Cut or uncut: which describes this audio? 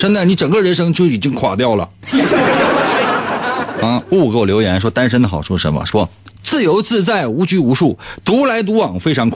uncut